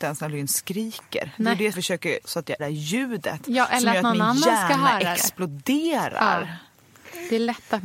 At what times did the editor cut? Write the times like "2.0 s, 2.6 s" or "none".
1.7 s, 2.2 s, 2.6 s